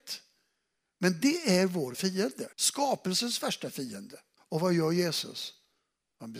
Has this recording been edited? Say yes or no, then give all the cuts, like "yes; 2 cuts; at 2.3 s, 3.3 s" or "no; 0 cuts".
yes; 3 cuts; at 1.9 s, 2.5 s, 4.4 s